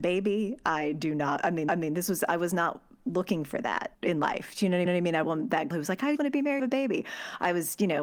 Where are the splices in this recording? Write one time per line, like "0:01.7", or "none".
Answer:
0:01.7
0:03.9
0:04.9
0:05.2
0:05.7
0:06.2
0:06.6